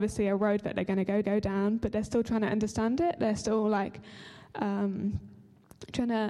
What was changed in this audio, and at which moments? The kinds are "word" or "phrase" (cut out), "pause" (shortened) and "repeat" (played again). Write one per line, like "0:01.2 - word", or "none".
0:01.2 - repeat